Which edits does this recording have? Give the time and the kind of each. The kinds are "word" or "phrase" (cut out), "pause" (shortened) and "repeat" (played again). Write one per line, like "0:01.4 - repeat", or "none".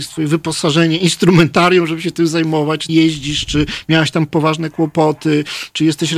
0:02.9 - word